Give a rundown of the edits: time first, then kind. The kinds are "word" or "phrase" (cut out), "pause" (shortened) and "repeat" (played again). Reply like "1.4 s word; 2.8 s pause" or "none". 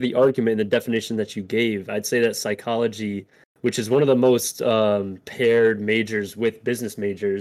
none